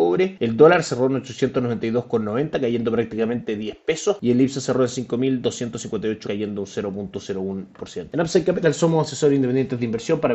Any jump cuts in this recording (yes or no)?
yes